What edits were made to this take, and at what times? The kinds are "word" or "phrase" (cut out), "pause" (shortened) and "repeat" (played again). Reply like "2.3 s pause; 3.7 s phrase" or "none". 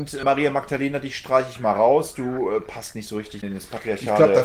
3.4 s word